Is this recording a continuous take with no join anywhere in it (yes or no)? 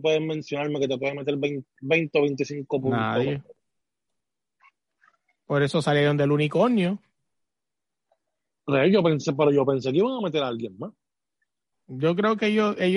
yes